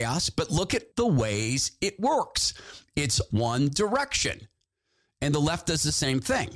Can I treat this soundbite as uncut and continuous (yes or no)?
no